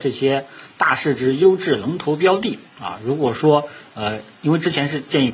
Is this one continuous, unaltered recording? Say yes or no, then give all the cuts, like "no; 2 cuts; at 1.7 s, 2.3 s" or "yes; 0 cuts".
yes; 0 cuts